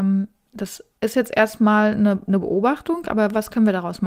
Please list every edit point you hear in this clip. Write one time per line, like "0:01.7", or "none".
0:00.9